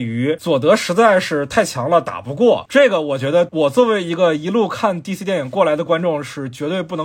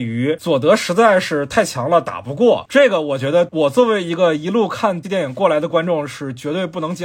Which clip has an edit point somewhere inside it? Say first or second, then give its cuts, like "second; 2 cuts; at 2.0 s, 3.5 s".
second; 1 cut; at 5.0 s